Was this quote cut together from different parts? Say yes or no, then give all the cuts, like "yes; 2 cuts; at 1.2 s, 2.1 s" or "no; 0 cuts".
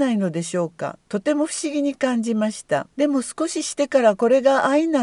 yes; 2 cuts; at 1.0 s, 2.9 s